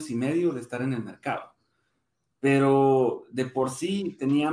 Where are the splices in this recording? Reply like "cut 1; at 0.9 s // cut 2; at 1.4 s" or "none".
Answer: none